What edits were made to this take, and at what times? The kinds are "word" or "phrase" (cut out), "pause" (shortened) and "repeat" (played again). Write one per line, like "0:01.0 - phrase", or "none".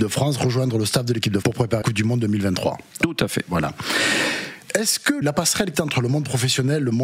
0:01.4 - word
0:01.8 - word
0:05.2 - word
0:05.7 - word